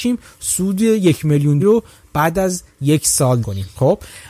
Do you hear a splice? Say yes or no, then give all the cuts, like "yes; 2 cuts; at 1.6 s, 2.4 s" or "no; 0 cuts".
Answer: yes; 3 cuts; at 1.6 s, 2.7 s, 3.4 s